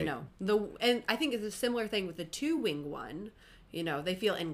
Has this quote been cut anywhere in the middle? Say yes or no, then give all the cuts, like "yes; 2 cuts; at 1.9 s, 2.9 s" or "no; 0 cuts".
no; 0 cuts